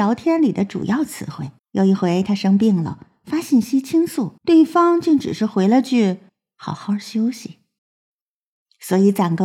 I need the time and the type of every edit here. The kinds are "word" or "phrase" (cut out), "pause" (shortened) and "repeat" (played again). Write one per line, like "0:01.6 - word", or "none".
0:01.6 - pause
0:04.4 - pause
0:06.3 - pause
0:07.8 - pause